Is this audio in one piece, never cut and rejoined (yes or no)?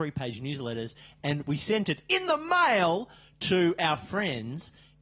yes